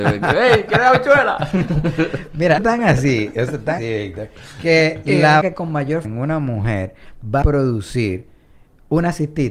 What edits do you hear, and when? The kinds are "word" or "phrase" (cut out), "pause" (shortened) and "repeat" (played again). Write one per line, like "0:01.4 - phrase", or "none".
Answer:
0:02.6 - word
0:03.8 - word
0:05.4 - word
0:06.0 - word
0:07.4 - word